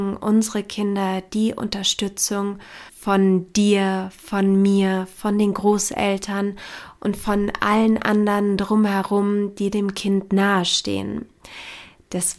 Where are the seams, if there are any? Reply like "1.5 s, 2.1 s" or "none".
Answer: 2.9 s